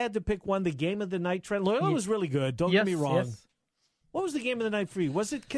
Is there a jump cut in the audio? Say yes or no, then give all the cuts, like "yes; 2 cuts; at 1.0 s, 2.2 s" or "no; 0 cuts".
no; 0 cuts